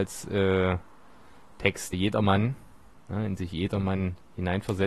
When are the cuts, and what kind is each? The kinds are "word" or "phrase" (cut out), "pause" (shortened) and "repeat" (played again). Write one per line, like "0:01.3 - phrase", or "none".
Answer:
0:01.9 - word
0:03.4 - word